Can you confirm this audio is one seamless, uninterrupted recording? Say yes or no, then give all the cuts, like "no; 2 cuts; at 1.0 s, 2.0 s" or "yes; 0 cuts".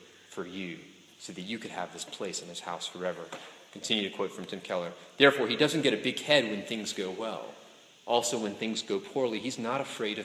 yes; 0 cuts